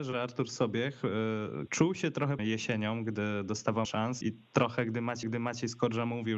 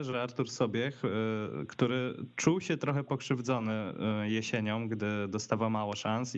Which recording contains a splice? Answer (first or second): first